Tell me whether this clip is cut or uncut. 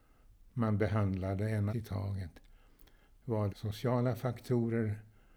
cut